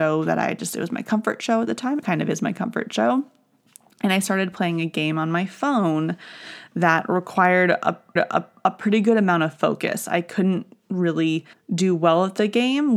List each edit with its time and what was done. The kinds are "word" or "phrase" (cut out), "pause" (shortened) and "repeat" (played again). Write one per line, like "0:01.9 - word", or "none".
0:02.0 - word
0:08.2 - repeat
0:11.5 - pause